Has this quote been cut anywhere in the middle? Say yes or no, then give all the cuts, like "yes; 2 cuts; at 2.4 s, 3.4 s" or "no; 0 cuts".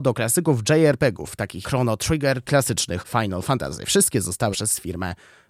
yes; 4 cuts; at 1.6 s, 2.4 s, 3.0 s, 4.5 s